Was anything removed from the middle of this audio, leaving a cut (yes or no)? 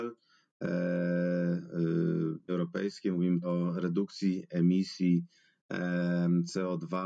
yes